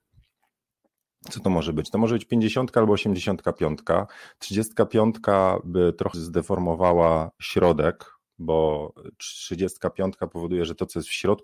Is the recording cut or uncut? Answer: cut